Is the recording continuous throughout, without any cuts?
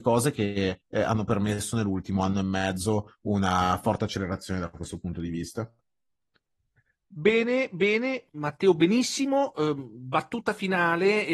yes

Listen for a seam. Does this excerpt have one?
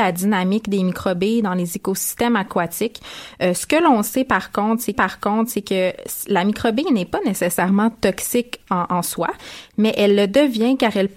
yes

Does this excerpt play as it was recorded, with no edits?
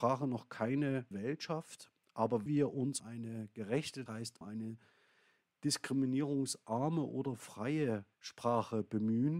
no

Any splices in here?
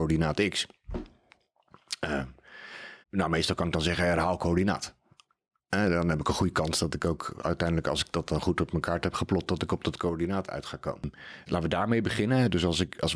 yes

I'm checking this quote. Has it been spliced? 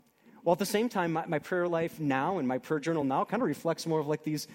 no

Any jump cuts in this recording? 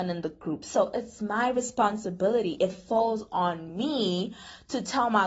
no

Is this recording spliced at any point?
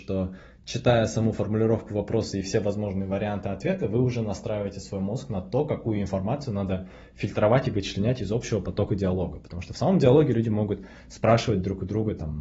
no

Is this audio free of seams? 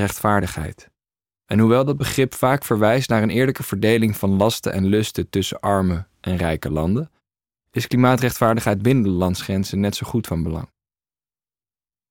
yes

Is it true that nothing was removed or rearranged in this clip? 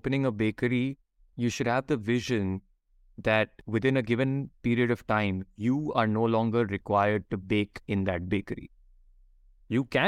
yes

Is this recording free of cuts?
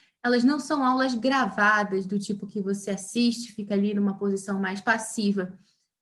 yes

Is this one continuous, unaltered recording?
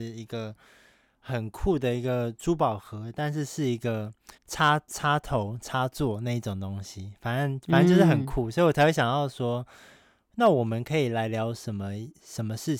no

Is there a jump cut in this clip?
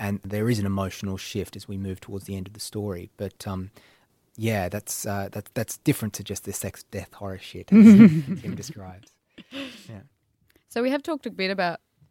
no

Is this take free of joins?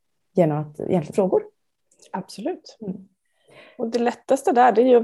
no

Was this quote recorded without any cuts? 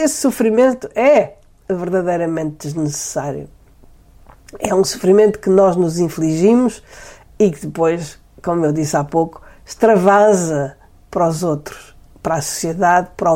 yes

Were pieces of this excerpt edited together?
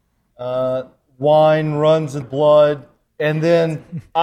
yes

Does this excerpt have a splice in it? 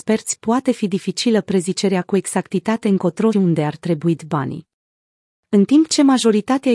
yes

